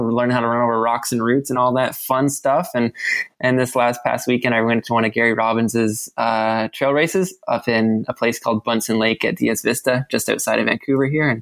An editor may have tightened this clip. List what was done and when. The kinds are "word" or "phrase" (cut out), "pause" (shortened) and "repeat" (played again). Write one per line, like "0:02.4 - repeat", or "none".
none